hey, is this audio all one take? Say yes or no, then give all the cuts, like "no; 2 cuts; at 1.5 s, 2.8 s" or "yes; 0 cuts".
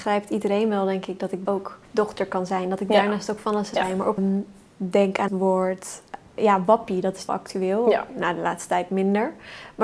no; 6 cuts; at 1.5 s, 1.8 s, 3.7 s, 4.2 s, 5.3 s, 7.3 s